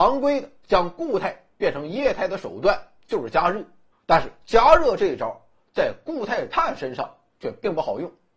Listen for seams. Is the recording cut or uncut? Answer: cut